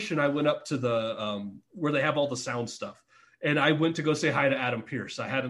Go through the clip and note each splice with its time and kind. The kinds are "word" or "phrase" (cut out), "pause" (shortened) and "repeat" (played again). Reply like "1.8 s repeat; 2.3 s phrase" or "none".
none